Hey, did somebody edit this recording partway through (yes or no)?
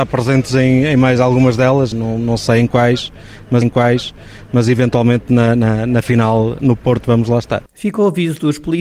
yes